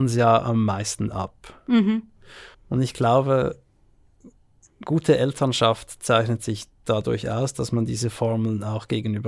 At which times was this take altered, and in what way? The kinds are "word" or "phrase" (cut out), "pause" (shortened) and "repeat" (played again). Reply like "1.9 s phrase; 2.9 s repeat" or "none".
2.5 s pause; 4.6 s pause